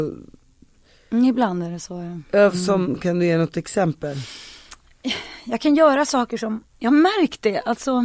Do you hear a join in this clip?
yes; 1 cut; at 6.7 s

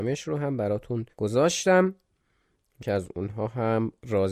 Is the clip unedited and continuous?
no; 2 cuts; at 1.1 s, 2.8 s

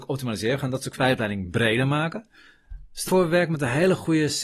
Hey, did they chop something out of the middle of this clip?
yes; 2 cuts; at 1.0 s, 3.1 s

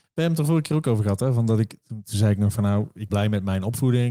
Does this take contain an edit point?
yes; 1 cut; at 3.1 s

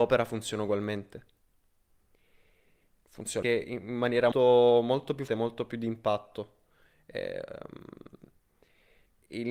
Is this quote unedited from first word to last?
no; 3 cuts; at 3.4 s, 4.3 s, 5.3 s

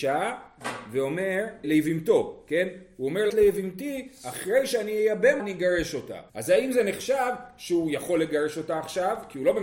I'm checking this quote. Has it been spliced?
yes; 4 cuts; at 1.6 s, 3.3 s, 5.4 s, 6.3 s

